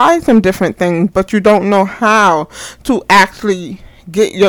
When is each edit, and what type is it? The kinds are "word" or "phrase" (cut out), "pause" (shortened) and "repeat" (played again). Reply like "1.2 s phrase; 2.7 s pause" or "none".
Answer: none